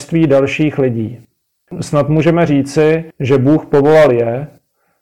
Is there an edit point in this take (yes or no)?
yes